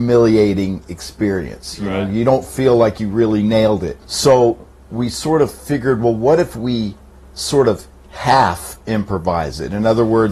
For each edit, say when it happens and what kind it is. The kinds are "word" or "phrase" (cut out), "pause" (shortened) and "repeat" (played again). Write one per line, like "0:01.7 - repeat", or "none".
0:04.0 - pause
0:07.2 - pause